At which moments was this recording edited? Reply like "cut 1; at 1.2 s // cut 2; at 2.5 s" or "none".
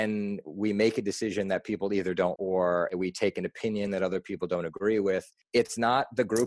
cut 1; at 2.4 s